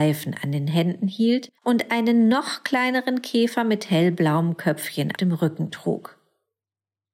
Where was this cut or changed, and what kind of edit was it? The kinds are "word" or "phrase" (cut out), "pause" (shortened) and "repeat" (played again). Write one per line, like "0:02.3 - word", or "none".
0:01.6 - pause
0:05.2 - word